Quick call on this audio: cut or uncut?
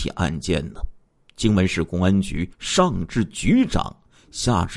cut